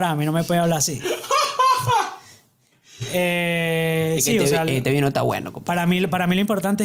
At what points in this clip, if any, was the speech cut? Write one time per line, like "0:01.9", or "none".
none

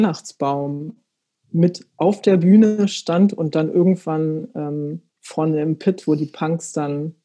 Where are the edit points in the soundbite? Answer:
0:05.1

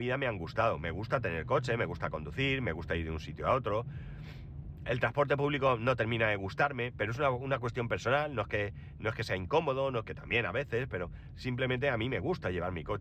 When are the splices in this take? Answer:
none

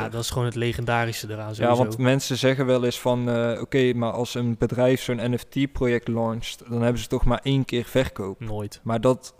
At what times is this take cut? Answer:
none

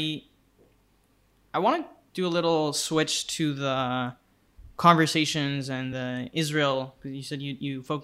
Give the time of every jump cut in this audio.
none

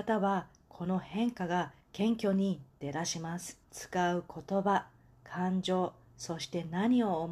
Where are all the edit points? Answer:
0:01.8
0:03.6

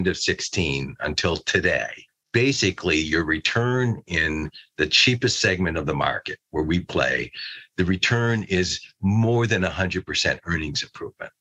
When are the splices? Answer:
0:02.1

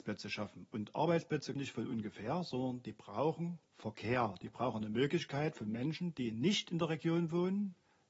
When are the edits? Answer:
0:01.6
0:03.7

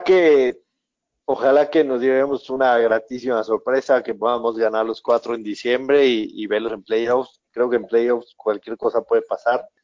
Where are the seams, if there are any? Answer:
0:07.5

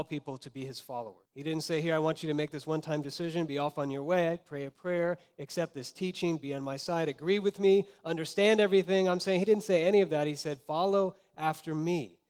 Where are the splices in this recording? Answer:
0:01.2

